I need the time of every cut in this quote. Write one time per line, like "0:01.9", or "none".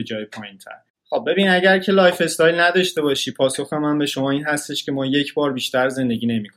none